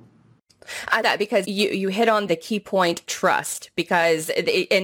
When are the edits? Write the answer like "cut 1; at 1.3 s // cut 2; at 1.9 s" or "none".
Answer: cut 1; at 1.0 s // cut 2; at 1.4 s // cut 3; at 2.3 s // cut 4; at 3.0 s